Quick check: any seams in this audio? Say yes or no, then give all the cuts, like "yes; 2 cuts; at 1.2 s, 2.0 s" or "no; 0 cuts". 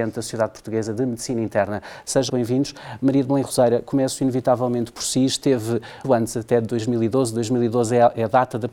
yes; 2 cuts; at 2.3 s, 6.0 s